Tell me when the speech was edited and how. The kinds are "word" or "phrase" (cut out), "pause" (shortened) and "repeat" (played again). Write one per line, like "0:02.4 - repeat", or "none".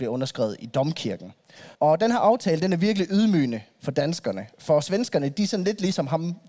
0:01.7 - pause